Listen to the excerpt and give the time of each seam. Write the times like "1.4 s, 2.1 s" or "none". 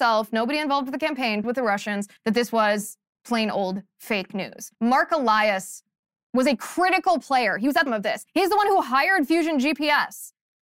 1.4 s, 2.2 s, 3.1 s, 4.7 s, 6.2 s, 7.9 s, 8.3 s